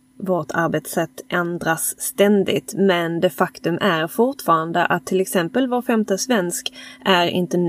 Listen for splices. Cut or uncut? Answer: uncut